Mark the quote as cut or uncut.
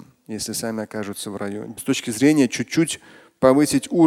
cut